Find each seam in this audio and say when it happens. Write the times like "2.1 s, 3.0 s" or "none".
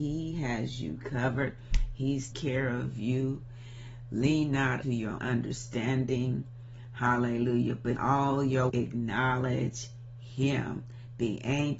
2.3 s, 4.8 s, 5.2 s, 8.0 s, 8.7 s